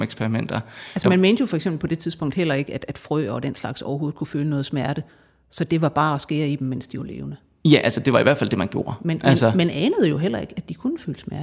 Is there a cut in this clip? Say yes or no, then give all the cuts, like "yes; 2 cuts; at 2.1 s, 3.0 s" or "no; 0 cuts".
no; 0 cuts